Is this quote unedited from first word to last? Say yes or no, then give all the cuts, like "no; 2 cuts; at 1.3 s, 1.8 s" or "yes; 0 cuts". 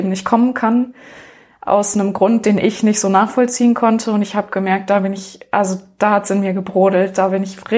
yes; 0 cuts